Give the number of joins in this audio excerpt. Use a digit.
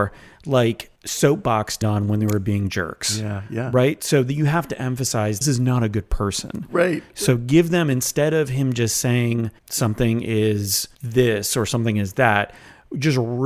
5